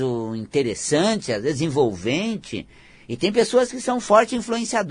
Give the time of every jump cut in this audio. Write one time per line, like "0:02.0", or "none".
none